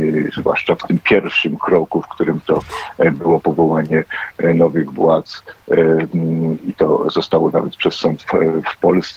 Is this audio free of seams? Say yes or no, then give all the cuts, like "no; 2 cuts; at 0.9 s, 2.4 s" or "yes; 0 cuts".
yes; 0 cuts